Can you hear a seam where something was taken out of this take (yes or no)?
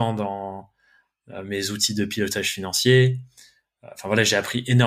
no